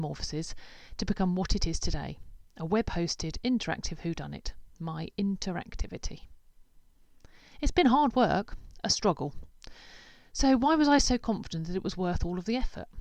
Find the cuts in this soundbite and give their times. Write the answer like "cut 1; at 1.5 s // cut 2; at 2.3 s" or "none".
none